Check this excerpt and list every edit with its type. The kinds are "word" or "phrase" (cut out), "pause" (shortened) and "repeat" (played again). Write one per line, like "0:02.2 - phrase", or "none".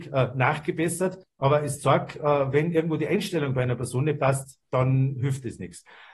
0:01.2 - pause

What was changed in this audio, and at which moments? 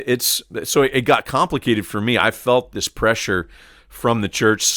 none

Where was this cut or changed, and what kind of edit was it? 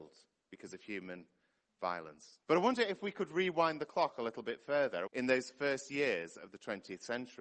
0:02.4 - pause
0:05.1 - phrase

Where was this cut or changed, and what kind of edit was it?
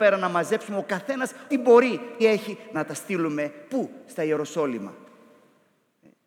0:01.5 - word
0:02.2 - word
0:02.7 - phrase

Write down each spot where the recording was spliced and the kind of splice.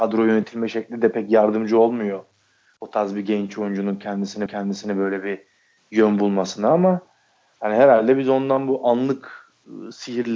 0:04.5 - repeat

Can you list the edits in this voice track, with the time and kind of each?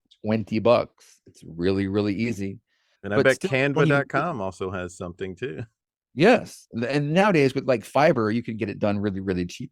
none

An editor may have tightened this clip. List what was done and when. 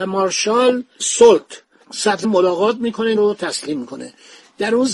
0:02.2 - word
0:03.2 - phrase

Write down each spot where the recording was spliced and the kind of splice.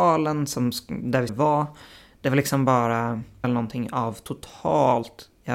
0:01.3 - word
0:03.4 - phrase

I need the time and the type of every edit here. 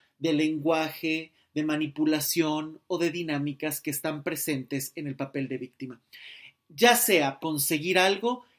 0:07.4 - word

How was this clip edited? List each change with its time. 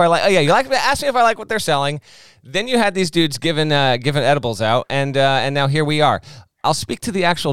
none

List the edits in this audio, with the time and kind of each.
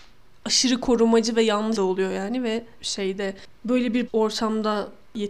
0:01.7 - phrase
0:02.8 - phrase
0:04.1 - word

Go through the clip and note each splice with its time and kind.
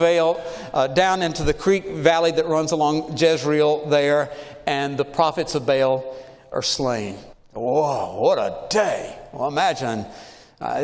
0:07.3 - pause

